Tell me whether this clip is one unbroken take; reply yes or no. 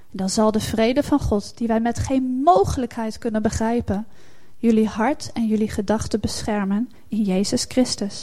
yes